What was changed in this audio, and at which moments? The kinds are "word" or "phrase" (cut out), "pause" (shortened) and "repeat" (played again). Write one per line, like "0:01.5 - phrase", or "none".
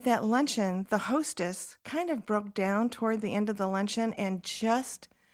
0:01.8 - pause